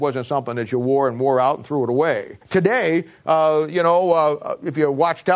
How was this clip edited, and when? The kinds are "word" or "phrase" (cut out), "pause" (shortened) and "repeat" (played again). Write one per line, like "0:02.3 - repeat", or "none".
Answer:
0:02.4 - pause